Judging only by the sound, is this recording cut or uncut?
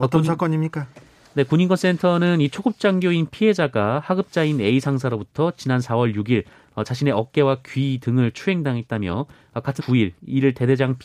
cut